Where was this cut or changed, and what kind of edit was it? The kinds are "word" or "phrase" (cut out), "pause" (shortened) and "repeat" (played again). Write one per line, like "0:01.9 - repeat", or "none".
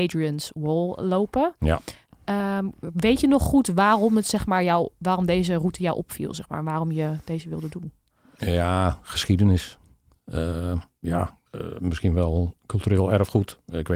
0:11.5 - pause